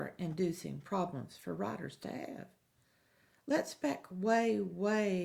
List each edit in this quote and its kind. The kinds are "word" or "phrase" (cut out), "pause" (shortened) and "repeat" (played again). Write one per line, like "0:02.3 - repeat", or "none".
none